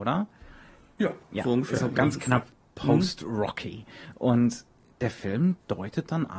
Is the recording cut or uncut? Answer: uncut